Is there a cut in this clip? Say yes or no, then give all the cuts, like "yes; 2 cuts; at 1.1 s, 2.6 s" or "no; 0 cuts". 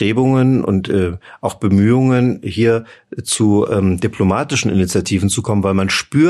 no; 0 cuts